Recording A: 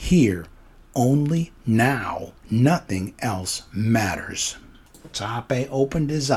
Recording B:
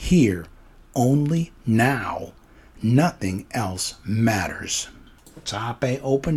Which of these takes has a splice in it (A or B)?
A